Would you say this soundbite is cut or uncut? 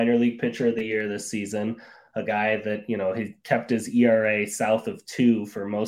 uncut